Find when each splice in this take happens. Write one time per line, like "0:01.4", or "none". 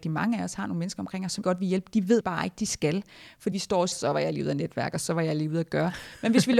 0:01.4
0:02.2
0:03.5
0:03.9